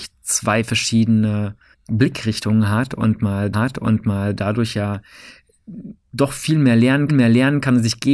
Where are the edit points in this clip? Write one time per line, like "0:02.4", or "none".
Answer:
0:01.7
0:03.5
0:07.1